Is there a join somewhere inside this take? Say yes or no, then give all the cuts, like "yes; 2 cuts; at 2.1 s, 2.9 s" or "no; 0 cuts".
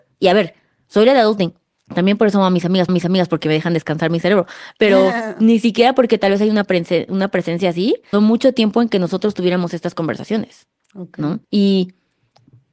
yes; 4 cuts; at 1.8 s, 2.9 s, 8.1 s, 11.4 s